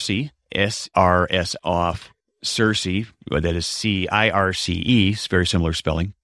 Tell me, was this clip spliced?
yes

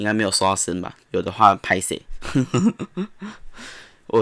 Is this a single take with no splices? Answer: no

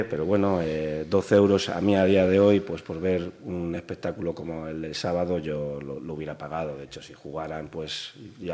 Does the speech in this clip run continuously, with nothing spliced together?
yes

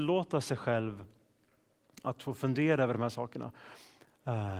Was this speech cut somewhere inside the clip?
no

